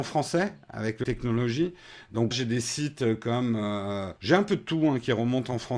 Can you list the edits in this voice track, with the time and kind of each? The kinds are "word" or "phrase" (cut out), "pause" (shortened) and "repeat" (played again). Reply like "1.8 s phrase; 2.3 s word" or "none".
1.0 s word; 2.3 s word; 4.2 s pause